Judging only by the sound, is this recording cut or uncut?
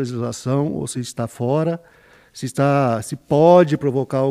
uncut